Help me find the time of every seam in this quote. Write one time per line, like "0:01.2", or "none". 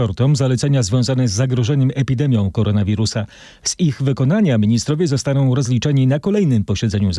none